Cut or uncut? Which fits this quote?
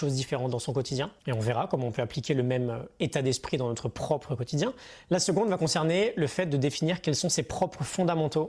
cut